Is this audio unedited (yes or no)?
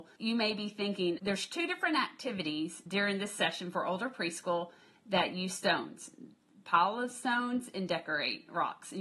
yes